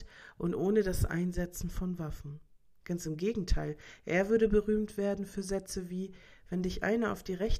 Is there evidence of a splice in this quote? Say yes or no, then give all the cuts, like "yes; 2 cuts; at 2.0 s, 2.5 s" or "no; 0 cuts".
no; 0 cuts